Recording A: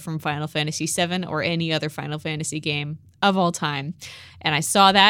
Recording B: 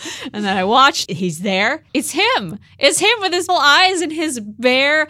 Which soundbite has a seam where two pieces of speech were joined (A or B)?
B